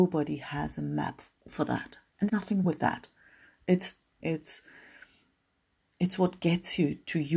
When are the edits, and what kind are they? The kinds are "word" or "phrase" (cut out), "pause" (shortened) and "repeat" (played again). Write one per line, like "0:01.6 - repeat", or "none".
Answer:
0:01.3 - pause
0:02.3 - word
0:02.6 - word
0:04.2 - phrase